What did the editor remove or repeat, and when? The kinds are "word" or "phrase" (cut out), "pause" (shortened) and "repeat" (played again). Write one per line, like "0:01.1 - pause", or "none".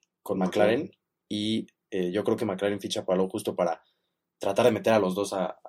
none